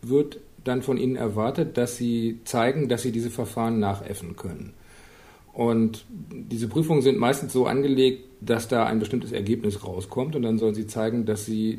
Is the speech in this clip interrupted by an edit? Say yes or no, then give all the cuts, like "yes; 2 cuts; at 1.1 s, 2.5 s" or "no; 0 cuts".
no; 0 cuts